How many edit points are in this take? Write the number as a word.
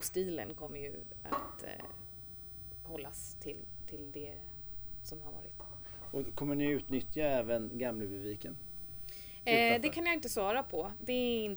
zero